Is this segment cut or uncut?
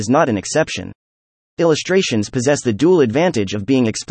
uncut